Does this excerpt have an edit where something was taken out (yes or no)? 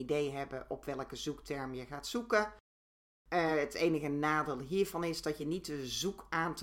no